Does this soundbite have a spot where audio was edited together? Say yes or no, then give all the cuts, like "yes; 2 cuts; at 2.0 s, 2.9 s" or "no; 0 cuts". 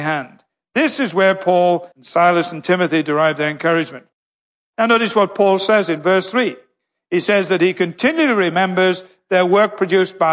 yes; 1 cut; at 1.9 s